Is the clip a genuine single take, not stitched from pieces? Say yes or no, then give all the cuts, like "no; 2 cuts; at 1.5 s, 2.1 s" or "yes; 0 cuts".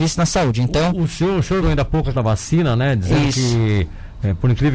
no; 2 cuts; at 1.6 s, 2.1 s